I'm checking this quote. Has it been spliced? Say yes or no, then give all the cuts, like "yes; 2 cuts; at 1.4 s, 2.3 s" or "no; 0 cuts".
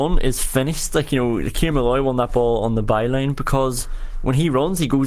no; 0 cuts